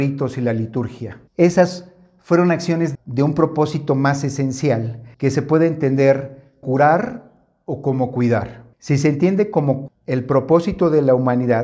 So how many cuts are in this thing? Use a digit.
6